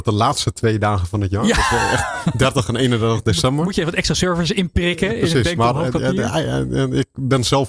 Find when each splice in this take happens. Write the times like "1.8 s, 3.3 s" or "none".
none